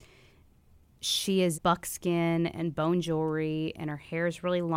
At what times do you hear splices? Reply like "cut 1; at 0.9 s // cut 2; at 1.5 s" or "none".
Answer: cut 1; at 1.5 s